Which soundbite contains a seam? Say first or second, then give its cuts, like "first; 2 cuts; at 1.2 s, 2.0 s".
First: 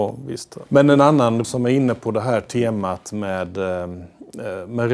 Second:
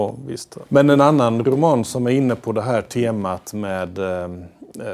first; 1 cut; at 1.4 s